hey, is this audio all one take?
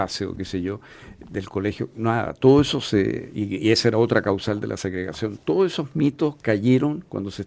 yes; 0 cuts

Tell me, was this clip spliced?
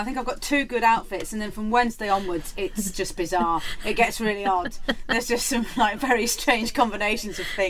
yes; 1 cut; at 2.9 s

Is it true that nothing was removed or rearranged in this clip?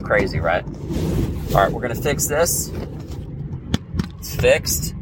yes; 0 cuts

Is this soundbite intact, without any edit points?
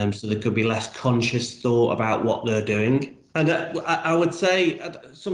yes; 0 cuts

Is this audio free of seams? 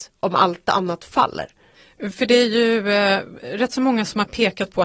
yes; 0 cuts

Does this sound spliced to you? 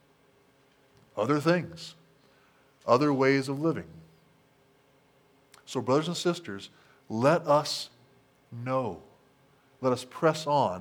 no; 0 cuts

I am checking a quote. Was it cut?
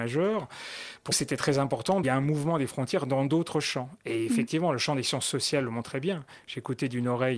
yes; 2 cuts; at 1.1 s, 2.0 s

